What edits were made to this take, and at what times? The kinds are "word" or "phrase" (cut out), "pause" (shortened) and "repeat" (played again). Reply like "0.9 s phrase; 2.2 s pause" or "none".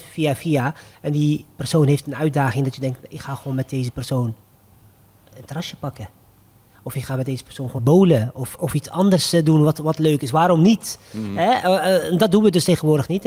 7.8 s word; 8.5 s word